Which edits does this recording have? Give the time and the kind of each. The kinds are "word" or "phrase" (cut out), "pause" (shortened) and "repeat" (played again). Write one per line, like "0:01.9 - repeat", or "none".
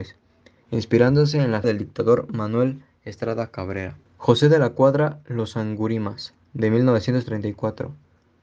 0:01.6 - word
0:04.1 - pause